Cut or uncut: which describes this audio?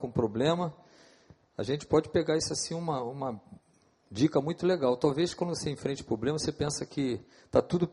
uncut